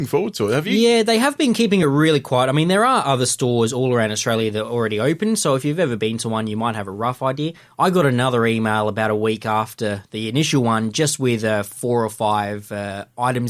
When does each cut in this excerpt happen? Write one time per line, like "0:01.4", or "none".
none